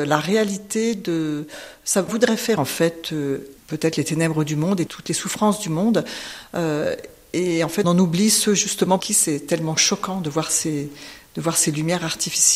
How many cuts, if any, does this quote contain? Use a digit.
6